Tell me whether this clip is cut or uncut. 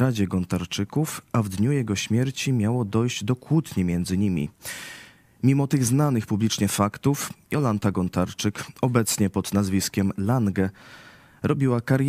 uncut